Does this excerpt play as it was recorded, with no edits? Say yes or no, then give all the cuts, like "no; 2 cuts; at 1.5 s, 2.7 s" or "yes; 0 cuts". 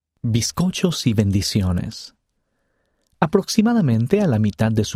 yes; 0 cuts